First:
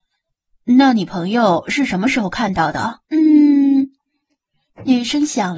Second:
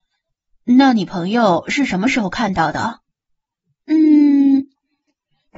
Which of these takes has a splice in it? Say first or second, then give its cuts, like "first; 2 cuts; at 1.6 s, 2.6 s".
first; 1 cut; at 3.0 s